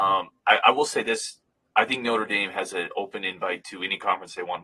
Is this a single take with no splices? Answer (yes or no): yes